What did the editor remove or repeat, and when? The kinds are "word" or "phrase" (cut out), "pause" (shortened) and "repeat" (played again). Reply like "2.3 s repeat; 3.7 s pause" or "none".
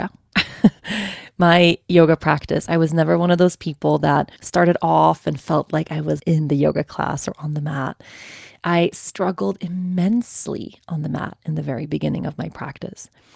4.4 s pause; 6.2 s phrase